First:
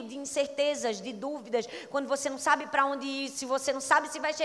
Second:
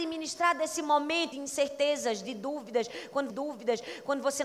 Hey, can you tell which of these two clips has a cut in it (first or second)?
second